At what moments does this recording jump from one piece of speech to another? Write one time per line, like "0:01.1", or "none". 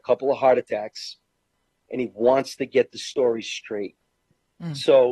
none

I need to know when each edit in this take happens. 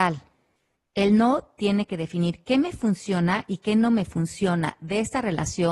none

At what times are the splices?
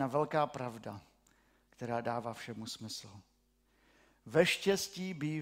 none

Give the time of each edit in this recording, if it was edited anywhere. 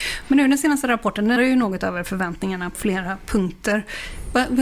0:01.4
0:02.7

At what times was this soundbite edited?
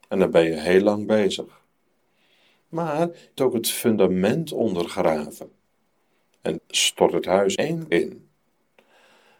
0:03.4
0:06.6
0:07.6
0:07.9

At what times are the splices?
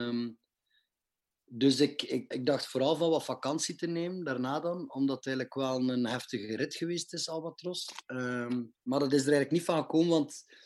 0:02.3
0:08.7

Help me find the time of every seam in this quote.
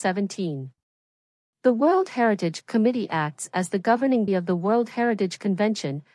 0:04.3

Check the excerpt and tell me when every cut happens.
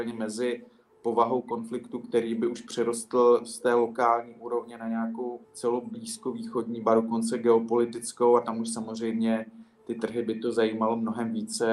0:05.4

